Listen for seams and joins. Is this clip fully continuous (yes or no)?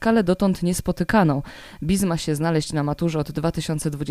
yes